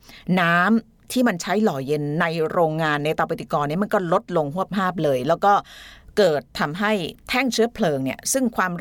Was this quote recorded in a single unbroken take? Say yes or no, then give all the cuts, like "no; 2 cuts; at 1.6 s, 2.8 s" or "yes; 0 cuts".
yes; 0 cuts